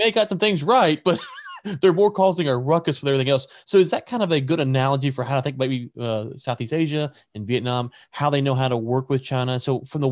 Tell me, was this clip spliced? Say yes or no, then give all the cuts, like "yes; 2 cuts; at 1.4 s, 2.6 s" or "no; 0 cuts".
no; 0 cuts